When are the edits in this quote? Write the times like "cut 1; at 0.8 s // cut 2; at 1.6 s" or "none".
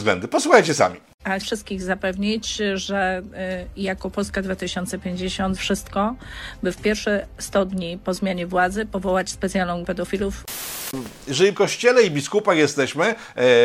cut 1; at 1.4 s // cut 2; at 5.6 s // cut 3; at 9.8 s // cut 4; at 11.5 s